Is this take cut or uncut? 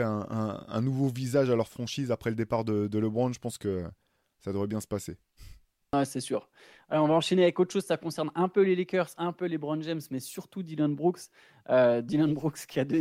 uncut